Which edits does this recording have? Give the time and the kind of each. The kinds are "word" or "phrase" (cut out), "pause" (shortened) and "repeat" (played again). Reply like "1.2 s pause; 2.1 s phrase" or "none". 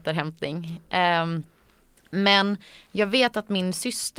none